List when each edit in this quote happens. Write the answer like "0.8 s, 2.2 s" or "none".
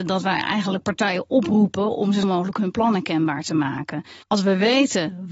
2.2 s, 4.2 s